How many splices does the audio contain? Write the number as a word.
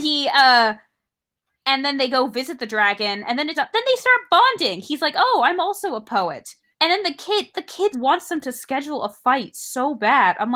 three